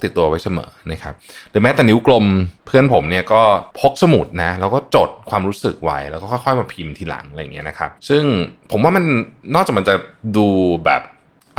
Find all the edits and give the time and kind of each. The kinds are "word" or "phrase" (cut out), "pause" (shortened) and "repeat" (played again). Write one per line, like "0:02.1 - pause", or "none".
0:02.6 - pause
0:03.7 - pause
0:08.0 - pause

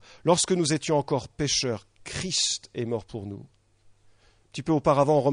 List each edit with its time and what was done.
none

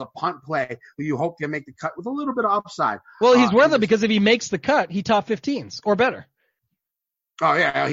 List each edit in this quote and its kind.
none

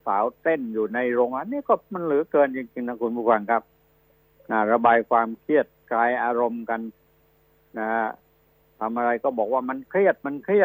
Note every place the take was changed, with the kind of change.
none

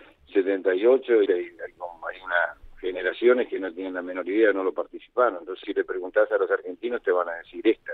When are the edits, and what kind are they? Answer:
0:01.3 - phrase
0:05.6 - word

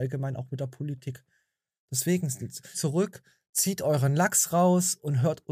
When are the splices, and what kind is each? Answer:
0:02.7 - phrase

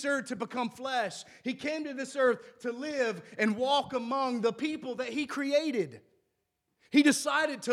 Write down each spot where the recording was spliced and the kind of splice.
none

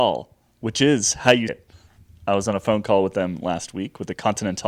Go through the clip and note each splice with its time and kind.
0:01.5 - word

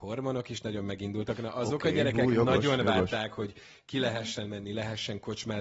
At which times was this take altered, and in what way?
none

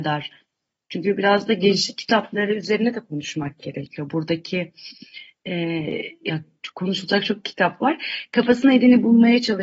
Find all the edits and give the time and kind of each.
none

